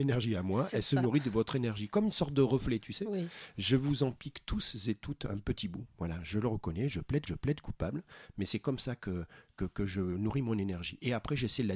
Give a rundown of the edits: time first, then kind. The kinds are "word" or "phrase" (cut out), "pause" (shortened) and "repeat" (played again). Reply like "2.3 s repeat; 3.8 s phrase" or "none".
7.3 s repeat; 9.6 s word